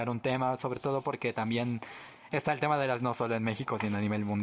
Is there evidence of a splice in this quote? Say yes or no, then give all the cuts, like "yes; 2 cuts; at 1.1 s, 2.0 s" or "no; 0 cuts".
yes; 1 cut; at 3.0 s